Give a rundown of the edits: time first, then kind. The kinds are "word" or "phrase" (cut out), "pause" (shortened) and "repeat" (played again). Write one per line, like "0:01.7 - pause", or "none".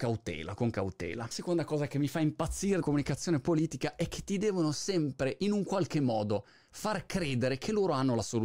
0:01.3 - word
0:02.8 - word